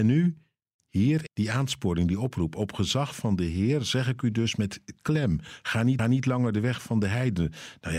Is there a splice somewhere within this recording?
yes; 2 cuts; at 1.3 s, 6.0 s

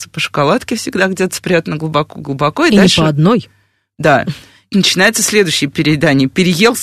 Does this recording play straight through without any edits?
no; 1 cut; at 4.7 s

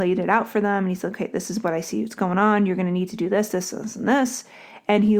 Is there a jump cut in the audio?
no; 0 cuts

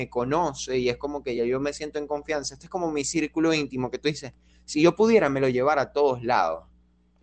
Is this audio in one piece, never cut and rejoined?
yes; 0 cuts

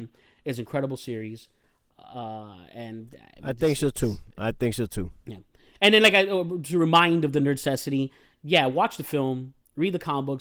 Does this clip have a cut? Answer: no; 0 cuts

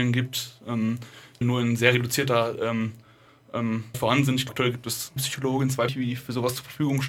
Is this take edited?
yes; 5 cuts; at 1.4 s, 3.9 s, 4.5 s, 5.2 s, 5.9 s

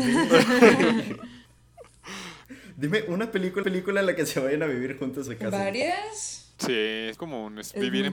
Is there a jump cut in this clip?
yes; 5 cuts; at 1.4 s, 3.6 s, 5.3 s, 6.6 s, 7.2 s

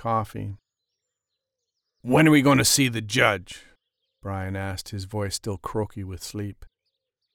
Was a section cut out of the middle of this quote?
no; 0 cuts

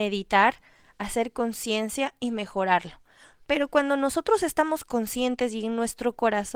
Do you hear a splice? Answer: no; 0 cuts

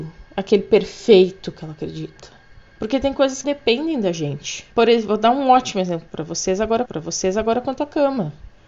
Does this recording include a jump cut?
yes; 4 cuts; at 2.7 s, 3.4 s, 4.7 s, 6.9 s

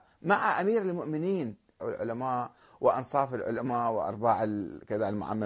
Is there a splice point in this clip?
yes; 1 cut; at 1.8 s

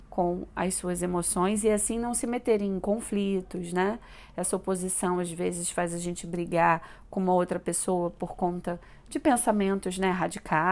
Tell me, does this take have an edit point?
no; 0 cuts

